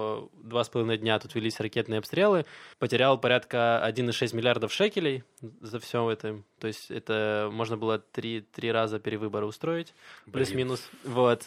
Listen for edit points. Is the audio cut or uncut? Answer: cut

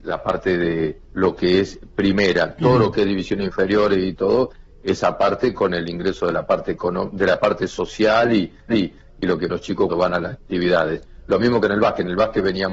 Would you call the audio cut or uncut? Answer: cut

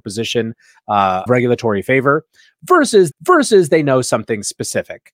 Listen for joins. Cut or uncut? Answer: cut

